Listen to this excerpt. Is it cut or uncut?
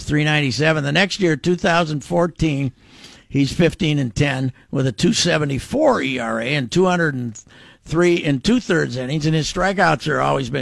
uncut